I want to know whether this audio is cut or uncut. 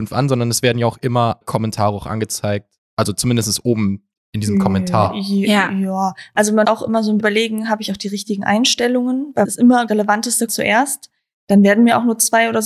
cut